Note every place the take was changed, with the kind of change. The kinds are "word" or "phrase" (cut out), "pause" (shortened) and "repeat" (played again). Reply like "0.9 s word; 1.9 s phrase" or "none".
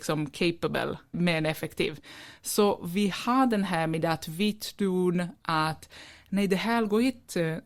1.1 s word